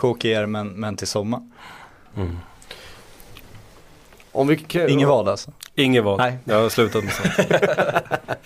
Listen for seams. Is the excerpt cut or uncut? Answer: uncut